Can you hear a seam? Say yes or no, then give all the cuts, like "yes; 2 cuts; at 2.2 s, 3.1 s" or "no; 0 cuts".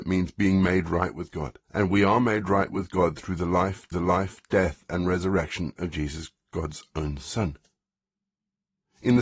yes; 2 cuts; at 1.6 s, 3.9 s